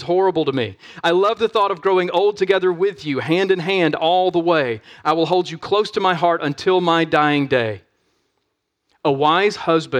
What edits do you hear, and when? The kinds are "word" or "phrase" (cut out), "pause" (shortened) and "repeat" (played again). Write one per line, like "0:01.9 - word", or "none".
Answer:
none